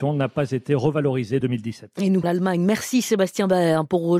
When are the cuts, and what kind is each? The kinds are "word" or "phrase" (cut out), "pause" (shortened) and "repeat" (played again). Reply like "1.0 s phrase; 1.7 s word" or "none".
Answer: 1.4 s word; 2.2 s word

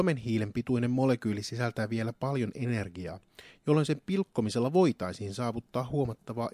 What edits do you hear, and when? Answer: none

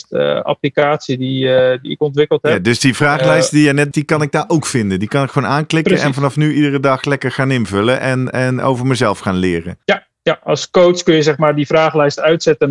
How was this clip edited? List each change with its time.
3.9 s word; 9.8 s pause

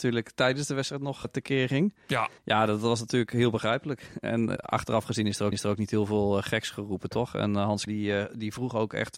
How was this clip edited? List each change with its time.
1.2 s word; 2.4 s pause; 4.6 s word; 5.5 s repeat; 7.9 s phrase

